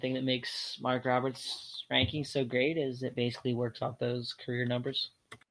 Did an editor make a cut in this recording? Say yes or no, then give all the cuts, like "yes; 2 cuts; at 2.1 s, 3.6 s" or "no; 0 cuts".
no; 0 cuts